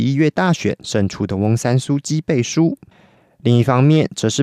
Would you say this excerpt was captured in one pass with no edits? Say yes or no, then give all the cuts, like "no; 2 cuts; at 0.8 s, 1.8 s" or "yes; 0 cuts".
yes; 0 cuts